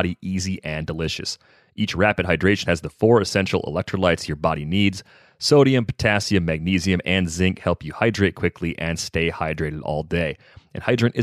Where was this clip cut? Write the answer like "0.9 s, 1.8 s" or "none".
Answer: 2.7 s